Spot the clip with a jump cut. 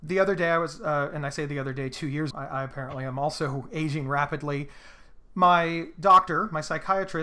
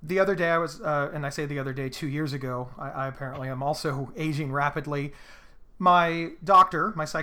first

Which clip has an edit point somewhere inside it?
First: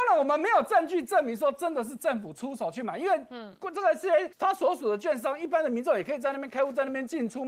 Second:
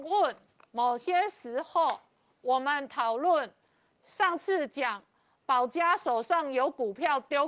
first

